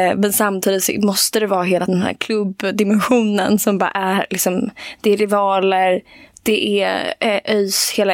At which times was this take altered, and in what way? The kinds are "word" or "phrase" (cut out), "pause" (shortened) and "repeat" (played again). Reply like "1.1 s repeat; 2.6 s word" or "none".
1.9 s word

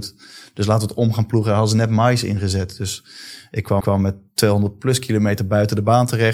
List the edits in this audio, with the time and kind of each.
3.8 s repeat

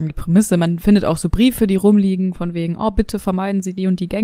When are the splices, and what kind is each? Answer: none

